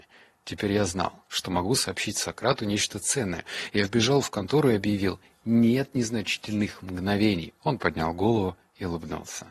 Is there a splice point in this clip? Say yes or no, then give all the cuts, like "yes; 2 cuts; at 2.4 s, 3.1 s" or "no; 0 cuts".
yes; 1 cut; at 7.6 s